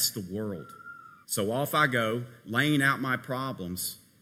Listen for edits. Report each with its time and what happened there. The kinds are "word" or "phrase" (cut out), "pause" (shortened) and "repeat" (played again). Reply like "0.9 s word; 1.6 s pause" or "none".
1.2 s pause